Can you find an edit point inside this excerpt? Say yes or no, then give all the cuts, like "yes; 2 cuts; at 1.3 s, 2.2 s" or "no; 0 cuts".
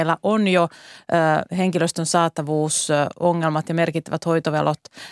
no; 0 cuts